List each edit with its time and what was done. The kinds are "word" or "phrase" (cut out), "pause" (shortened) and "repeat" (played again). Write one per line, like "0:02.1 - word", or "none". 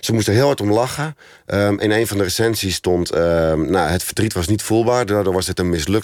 none